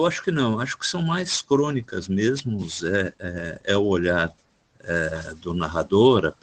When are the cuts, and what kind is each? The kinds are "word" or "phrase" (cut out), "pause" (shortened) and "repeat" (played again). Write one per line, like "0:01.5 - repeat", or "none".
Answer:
0:04.5 - pause